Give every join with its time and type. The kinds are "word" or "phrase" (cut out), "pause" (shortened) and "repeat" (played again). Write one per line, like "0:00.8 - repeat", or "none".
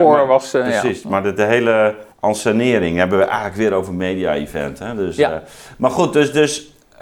0:02.1 - pause

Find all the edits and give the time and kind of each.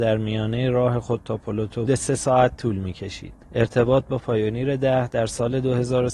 0:01.9 - phrase
0:03.4 - pause

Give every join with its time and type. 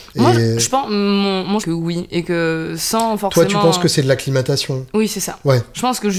0:01.6 - phrase

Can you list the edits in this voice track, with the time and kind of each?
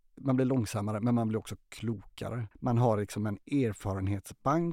0:02.5 - pause

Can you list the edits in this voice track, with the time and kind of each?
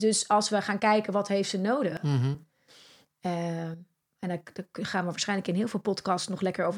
none

